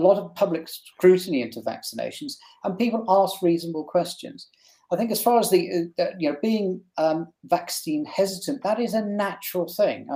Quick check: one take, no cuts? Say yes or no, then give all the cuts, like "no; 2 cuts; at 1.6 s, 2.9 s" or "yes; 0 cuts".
yes; 0 cuts